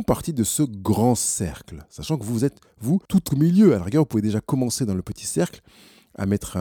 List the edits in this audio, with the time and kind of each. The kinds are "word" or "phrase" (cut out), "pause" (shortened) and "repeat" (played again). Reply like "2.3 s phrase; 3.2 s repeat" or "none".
3.0 s pause